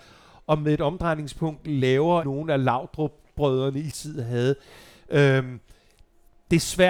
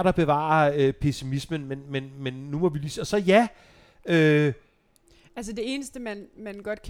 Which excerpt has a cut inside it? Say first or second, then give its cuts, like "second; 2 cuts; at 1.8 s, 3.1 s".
first; 2 cuts; at 2.2 s, 3.9 s